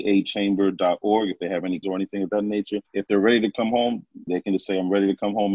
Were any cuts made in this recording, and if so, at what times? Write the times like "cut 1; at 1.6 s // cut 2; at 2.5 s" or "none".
cut 1; at 1.8 s // cut 2; at 2.8 s // cut 3; at 4.3 s